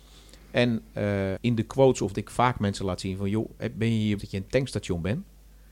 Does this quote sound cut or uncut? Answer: cut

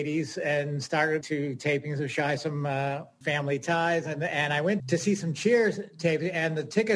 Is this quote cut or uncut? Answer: cut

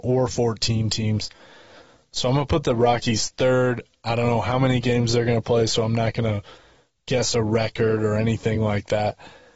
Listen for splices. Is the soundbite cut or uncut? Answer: uncut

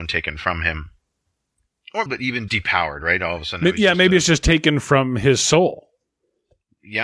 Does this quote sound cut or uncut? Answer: cut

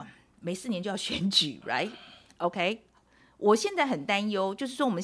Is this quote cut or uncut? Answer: uncut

